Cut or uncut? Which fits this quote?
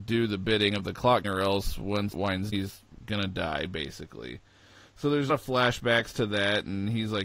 cut